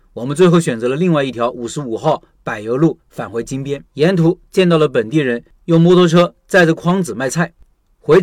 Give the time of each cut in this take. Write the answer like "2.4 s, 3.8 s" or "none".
3.9 s